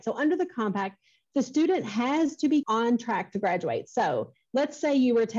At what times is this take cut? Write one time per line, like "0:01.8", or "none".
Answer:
0:02.6